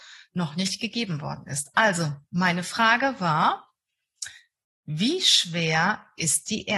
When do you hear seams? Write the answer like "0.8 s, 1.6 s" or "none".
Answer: none